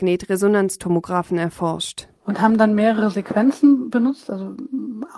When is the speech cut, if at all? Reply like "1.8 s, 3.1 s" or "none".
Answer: none